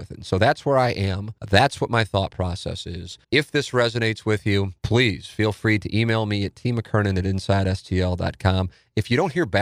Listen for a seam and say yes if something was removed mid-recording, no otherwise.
yes